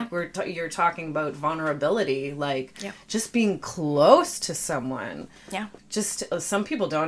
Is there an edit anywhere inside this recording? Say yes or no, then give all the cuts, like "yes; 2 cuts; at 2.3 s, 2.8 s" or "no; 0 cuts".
yes; 1 cut; at 5.8 s